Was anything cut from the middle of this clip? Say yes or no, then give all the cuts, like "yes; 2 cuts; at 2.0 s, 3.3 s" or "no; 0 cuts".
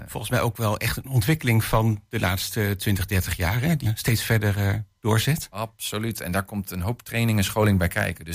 yes; 1 cut; at 3.8 s